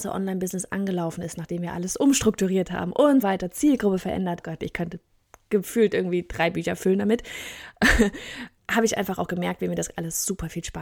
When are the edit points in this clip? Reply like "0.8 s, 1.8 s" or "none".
3.2 s, 4.4 s, 8.6 s